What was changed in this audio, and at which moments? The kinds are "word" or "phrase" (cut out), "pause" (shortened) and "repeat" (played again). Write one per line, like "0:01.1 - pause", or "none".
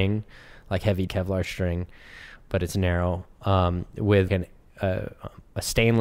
0:01.1 - word
0:04.3 - word